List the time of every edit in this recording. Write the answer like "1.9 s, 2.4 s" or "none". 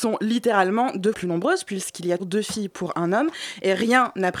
1.1 s, 2.2 s